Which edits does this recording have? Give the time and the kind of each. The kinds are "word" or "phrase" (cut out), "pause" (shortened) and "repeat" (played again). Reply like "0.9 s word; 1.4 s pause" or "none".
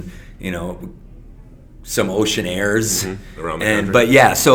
none